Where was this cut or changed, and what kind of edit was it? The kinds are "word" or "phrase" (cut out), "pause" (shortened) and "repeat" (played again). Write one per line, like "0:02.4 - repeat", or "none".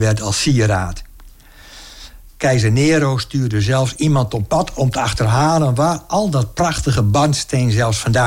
none